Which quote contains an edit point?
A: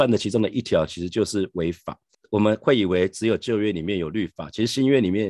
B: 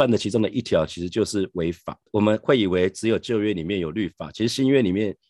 B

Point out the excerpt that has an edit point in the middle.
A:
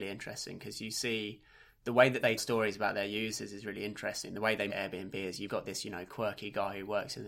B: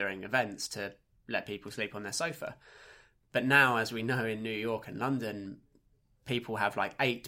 A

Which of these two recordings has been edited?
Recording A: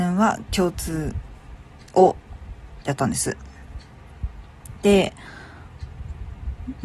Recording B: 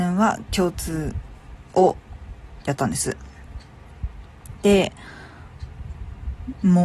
B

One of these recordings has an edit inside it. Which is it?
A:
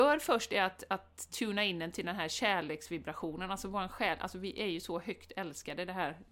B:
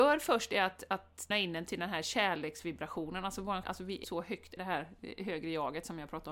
B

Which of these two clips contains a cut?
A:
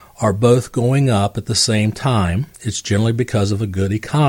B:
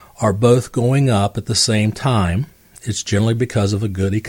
A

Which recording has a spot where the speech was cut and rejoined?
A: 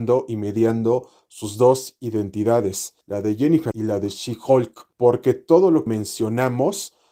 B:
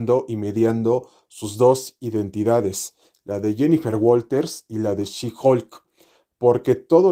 A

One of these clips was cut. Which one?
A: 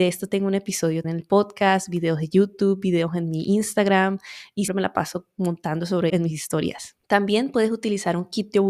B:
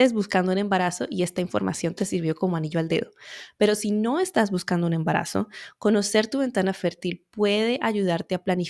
A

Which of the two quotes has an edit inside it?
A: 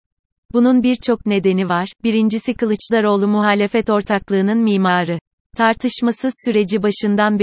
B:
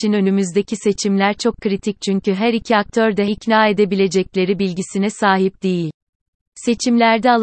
B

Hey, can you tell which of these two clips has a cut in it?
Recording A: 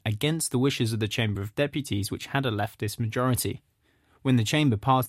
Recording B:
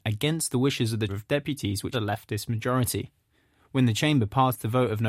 B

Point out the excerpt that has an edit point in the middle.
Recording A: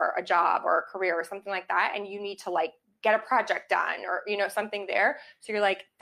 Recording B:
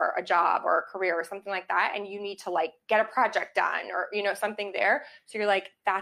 B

